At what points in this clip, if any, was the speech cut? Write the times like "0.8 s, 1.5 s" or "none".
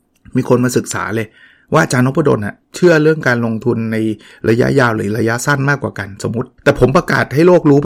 2.6 s, 6.6 s